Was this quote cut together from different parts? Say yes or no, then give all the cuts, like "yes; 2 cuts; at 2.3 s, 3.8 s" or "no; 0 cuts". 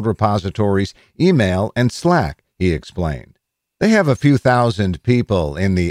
no; 0 cuts